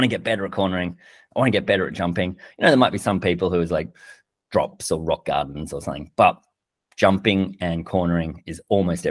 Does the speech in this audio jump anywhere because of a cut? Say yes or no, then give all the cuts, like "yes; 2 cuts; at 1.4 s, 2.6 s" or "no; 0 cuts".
no; 0 cuts